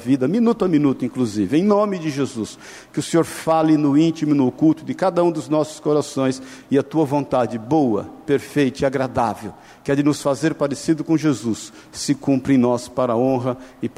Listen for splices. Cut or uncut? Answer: uncut